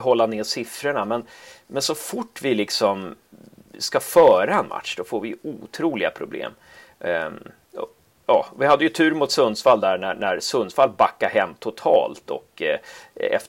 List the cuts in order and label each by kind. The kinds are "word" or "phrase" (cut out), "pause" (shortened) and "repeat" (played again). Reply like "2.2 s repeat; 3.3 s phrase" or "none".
none